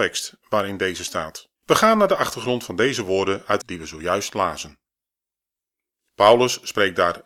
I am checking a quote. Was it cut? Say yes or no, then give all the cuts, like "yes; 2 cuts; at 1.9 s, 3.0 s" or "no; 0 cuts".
yes; 2 cuts; at 1.6 s, 3.6 s